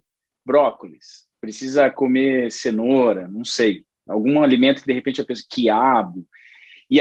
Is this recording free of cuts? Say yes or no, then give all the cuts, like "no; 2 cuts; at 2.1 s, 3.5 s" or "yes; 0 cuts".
yes; 0 cuts